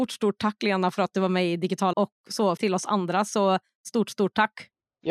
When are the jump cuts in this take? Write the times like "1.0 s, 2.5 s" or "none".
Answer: 1.9 s, 2.6 s

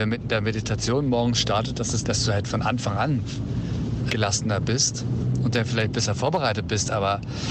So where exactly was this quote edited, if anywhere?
2.0 s, 4.1 s

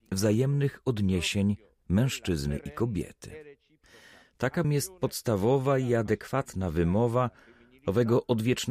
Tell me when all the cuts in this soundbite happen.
4.6 s

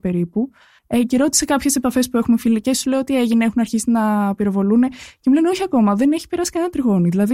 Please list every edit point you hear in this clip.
none

